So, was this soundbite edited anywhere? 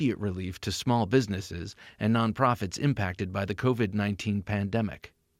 no; 0 cuts

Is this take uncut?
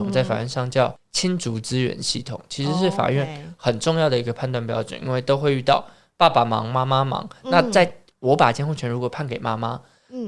yes; 0 cuts

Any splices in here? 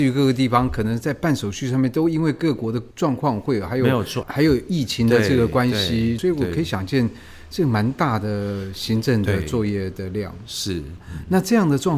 yes; 1 cut; at 4.2 s

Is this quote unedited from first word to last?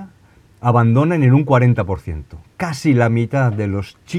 yes; 0 cuts

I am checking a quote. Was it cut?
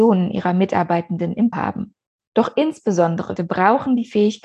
yes; 2 cuts; at 1.5 s, 3.4 s

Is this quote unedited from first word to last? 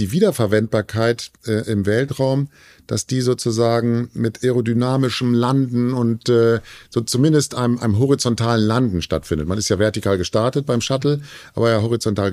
yes; 0 cuts

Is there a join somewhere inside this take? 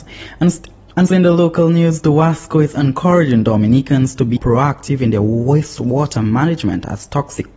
yes; 2 cuts; at 1.1 s, 4.4 s

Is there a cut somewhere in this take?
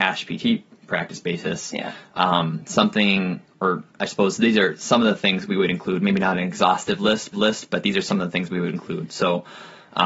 yes; 2 cuts; at 3.9 s, 7.3 s

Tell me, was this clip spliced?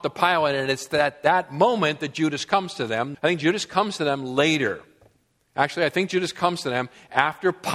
yes; 1 cut; at 3.1 s

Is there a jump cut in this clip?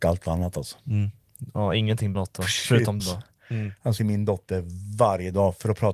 yes; 3 cuts; at 2.1 s, 3.0 s, 4.0 s

